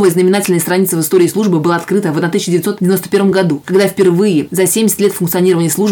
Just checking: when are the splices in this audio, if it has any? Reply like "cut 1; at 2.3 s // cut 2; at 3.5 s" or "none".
none